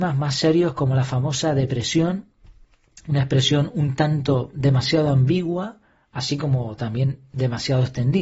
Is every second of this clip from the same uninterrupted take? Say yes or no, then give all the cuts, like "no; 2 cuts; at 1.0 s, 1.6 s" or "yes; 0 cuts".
yes; 0 cuts